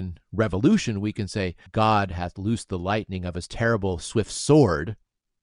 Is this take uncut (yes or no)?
no